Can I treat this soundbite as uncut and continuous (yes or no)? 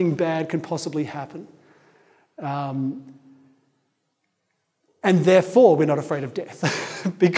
yes